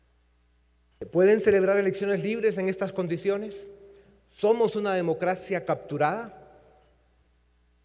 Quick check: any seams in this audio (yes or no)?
no